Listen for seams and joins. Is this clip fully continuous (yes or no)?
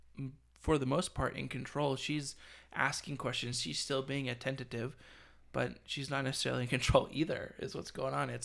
yes